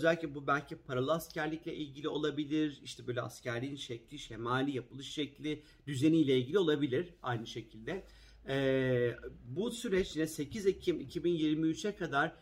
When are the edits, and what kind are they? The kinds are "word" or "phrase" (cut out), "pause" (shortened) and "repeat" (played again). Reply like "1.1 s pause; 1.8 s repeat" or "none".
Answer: none